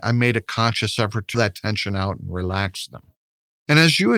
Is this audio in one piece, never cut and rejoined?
no; 1 cut; at 1.3 s

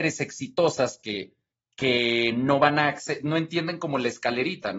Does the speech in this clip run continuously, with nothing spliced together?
no; 1 cut; at 1.5 s

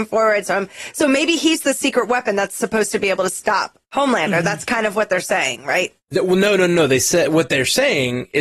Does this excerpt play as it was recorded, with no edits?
no; 2 cuts; at 3.8 s, 6.0 s

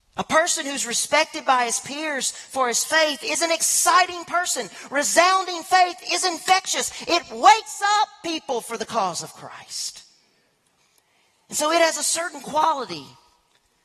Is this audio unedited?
yes; 0 cuts

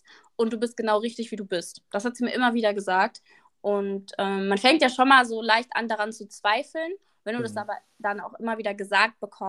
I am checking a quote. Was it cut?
no; 0 cuts

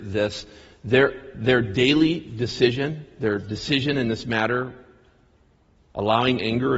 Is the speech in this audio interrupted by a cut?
no; 0 cuts

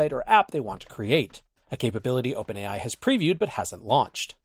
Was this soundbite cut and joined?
no; 0 cuts

